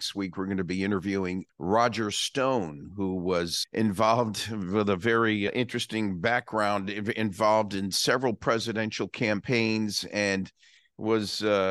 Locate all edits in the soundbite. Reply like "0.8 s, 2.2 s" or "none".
none